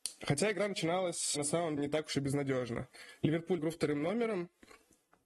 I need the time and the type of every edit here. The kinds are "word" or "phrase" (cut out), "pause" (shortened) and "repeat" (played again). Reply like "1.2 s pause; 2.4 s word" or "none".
1.4 s word; 1.8 s word; 3.6 s word